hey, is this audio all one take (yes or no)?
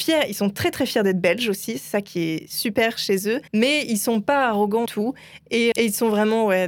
no